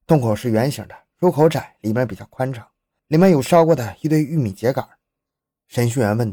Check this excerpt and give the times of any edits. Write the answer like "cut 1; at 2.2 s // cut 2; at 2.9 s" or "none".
none